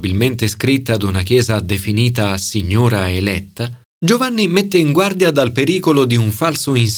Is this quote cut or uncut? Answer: cut